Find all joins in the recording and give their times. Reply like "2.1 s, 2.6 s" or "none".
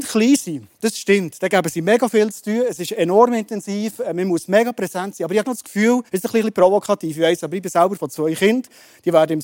5.4 s, 6.1 s, 8.0 s